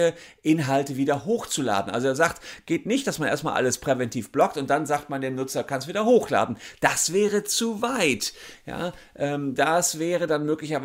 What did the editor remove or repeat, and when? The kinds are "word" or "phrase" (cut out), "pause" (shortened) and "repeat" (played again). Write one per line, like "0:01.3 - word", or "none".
none